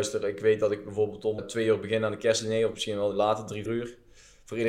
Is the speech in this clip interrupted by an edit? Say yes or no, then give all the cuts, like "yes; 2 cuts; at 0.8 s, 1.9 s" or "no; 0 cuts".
yes; 2 cuts; at 1.4 s, 3.7 s